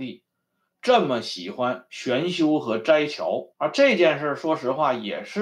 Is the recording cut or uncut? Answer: cut